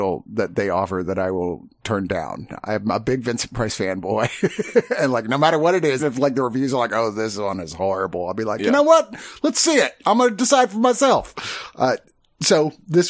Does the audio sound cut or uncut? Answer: cut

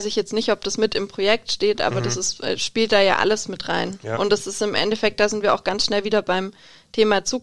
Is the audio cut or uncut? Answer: uncut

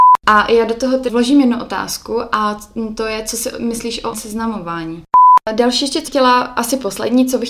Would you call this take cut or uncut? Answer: cut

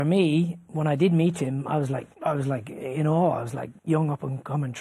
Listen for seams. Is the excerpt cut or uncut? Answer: cut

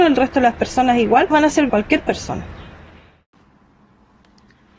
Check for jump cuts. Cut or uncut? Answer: cut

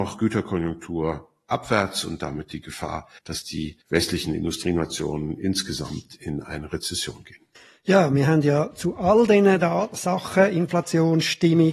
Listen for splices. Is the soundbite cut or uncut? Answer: cut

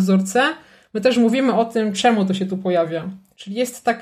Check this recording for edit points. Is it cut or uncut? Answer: uncut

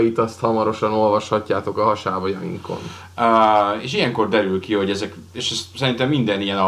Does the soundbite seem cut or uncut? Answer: uncut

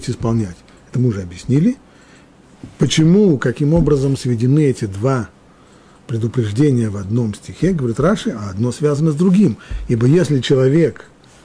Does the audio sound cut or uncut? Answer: uncut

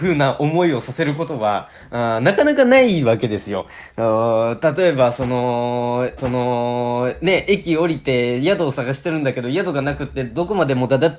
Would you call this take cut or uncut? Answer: cut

